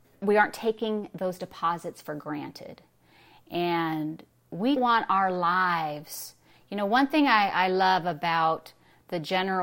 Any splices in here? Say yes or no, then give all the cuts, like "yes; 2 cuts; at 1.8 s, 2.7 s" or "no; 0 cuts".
yes; 1 cut; at 4.8 s